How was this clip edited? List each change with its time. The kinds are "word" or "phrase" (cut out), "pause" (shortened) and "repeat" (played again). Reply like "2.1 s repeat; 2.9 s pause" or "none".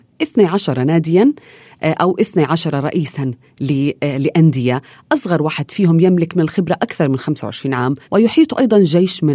8.0 s pause